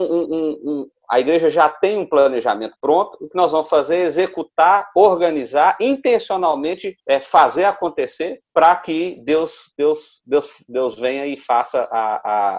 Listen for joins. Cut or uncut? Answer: cut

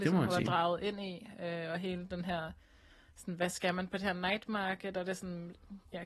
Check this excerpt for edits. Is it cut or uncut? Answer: uncut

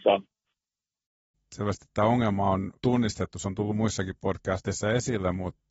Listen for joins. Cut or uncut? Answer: cut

